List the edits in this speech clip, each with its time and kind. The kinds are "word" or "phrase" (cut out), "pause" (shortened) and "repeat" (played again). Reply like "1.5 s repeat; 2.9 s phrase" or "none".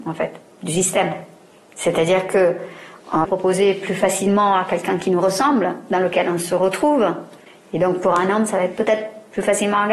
3.2 s phrase